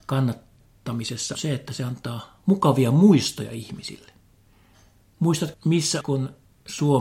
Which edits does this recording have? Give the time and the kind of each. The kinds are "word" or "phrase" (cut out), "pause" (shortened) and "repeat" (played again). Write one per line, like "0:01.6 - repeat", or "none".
0:01.3 - word
0:05.5 - word
0:06.0 - word